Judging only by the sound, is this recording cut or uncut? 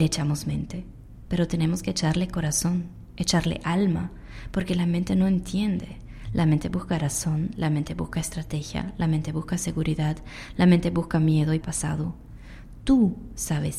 cut